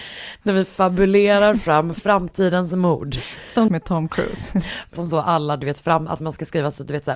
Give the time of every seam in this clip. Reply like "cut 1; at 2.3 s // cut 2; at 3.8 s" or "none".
cut 1; at 3.7 s // cut 2; at 4.9 s